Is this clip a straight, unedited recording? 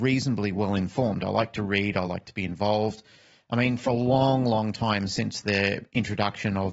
yes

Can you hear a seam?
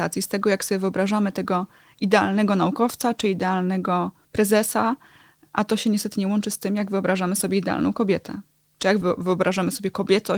yes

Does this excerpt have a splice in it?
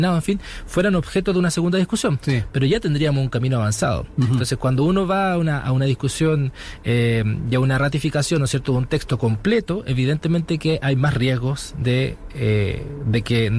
no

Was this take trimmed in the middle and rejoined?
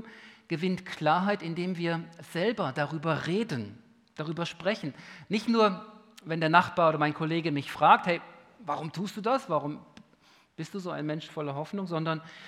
no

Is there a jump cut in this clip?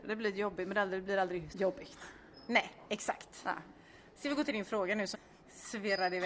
yes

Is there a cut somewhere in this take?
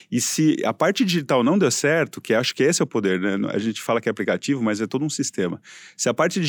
no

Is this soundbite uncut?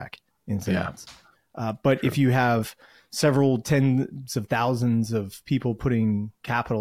yes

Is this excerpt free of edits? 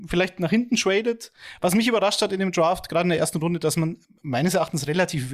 yes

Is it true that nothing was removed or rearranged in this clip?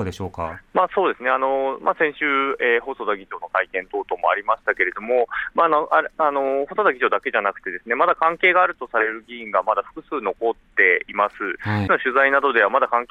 no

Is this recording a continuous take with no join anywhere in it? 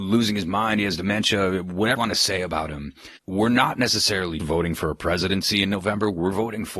no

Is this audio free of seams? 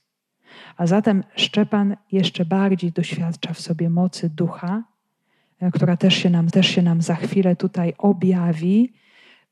no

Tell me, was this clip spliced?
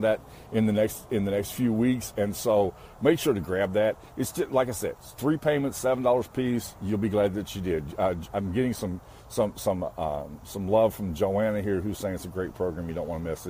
no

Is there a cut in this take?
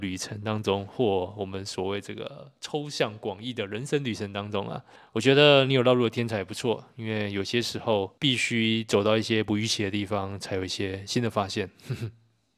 yes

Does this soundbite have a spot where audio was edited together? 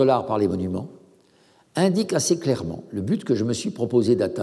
no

